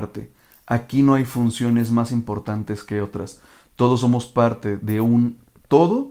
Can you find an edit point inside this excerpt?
no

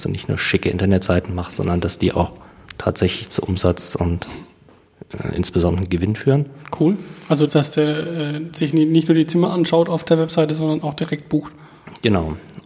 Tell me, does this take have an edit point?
yes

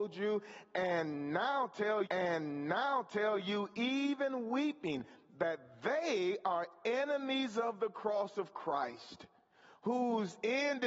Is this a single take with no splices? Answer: no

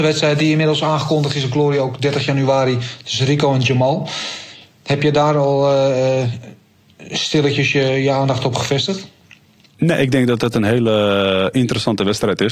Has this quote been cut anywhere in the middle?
no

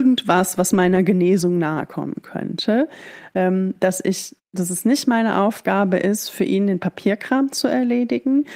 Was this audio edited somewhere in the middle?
no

